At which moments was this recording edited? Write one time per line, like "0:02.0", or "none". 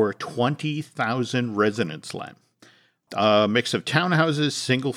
none